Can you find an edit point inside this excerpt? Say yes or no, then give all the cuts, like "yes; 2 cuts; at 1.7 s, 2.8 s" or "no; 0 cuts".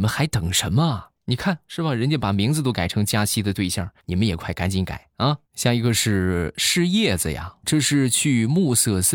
yes; 4 cuts; at 1.1 s, 4.0 s, 5.4 s, 7.6 s